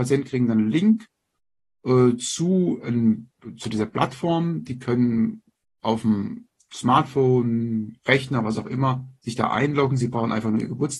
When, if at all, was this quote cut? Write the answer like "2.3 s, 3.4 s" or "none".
none